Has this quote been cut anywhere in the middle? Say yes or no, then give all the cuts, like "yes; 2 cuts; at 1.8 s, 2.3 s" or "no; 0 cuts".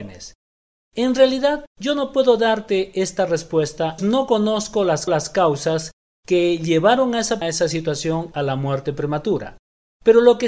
yes; 5 cuts; at 1.7 s, 4.0 s, 5.1 s, 7.4 s, 8.3 s